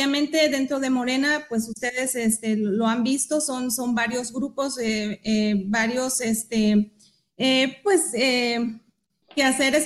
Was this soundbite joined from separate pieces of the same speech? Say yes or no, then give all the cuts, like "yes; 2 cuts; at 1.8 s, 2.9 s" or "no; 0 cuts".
no; 0 cuts